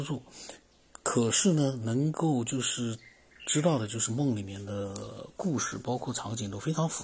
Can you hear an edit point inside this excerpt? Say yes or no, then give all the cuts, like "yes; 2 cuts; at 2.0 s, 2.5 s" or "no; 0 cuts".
no; 0 cuts